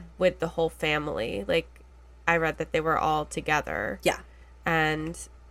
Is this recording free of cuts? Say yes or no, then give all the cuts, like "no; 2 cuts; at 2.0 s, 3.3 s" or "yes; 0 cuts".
yes; 0 cuts